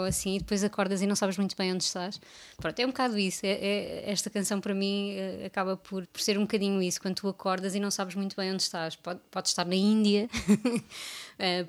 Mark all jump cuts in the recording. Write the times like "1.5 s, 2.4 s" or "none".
6.0 s